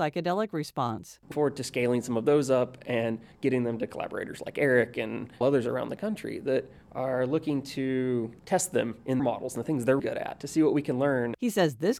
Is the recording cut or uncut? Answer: cut